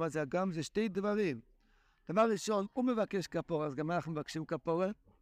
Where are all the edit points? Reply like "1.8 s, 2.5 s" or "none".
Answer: none